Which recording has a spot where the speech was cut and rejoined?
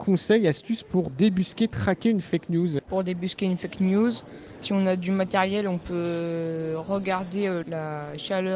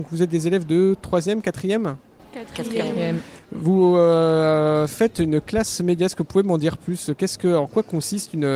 first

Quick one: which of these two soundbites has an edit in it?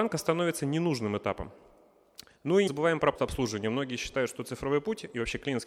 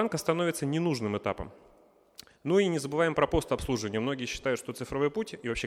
first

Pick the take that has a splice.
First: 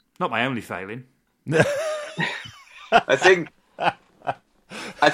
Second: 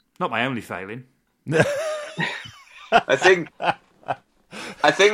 second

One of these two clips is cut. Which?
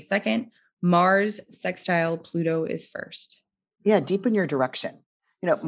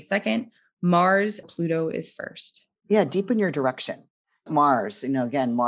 second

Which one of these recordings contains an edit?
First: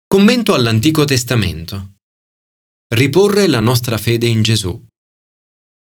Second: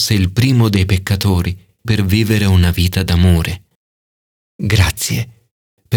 second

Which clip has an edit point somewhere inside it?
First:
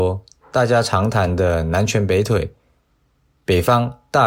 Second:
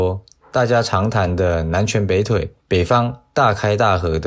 second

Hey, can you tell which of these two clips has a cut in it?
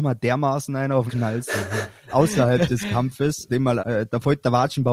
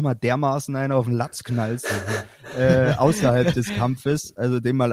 first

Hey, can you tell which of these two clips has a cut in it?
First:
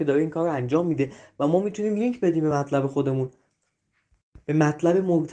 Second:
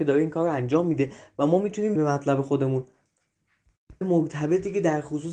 second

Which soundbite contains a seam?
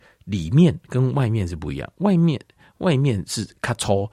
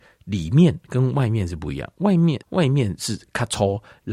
second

